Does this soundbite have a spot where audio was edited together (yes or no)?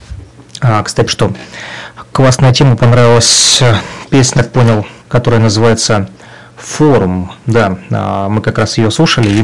yes